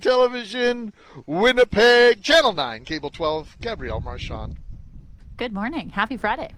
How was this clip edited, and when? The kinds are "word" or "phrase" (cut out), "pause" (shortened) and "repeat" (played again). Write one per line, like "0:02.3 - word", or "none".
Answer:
none